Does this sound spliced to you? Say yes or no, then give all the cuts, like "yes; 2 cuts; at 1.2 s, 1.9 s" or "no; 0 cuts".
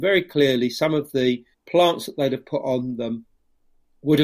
yes; 1 cut; at 1.5 s